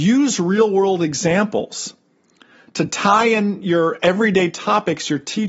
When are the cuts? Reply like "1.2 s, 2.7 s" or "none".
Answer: none